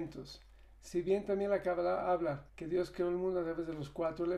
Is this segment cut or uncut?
cut